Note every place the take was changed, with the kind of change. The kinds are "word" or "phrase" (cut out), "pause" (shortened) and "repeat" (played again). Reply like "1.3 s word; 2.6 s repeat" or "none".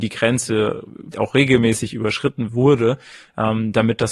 1.1 s word; 2.5 s phrase